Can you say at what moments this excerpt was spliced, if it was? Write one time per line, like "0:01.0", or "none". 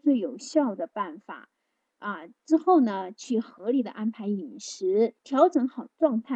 0:05.2